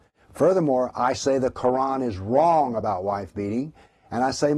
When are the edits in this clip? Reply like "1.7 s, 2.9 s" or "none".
none